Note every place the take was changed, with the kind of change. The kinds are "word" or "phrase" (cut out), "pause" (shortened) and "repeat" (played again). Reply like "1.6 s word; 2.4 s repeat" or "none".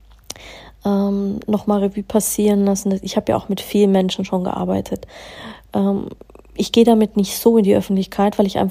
none